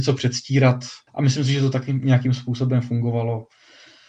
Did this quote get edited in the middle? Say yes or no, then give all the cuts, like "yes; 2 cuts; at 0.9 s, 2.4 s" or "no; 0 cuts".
yes; 1 cut; at 1.1 s